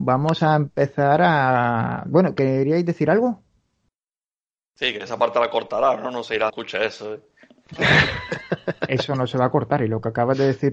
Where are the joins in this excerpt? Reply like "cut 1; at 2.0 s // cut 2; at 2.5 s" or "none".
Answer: cut 1; at 2.4 s // cut 2; at 6.5 s